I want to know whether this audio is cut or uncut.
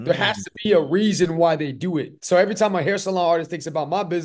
cut